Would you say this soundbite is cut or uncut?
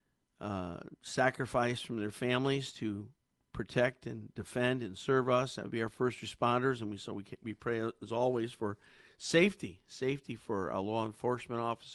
uncut